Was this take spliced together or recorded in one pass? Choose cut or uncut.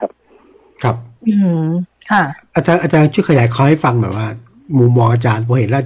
cut